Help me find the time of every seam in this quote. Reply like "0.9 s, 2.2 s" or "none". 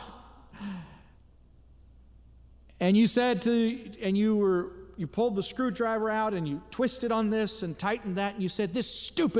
none